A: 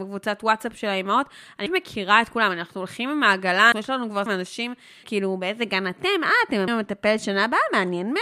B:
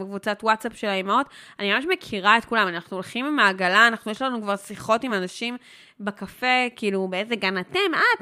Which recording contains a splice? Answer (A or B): A